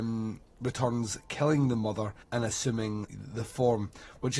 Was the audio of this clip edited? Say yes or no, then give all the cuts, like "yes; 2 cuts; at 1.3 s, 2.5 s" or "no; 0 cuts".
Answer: yes; 2 cuts; at 2.2 s, 3.1 s